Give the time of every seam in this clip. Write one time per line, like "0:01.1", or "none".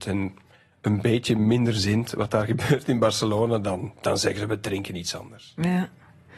none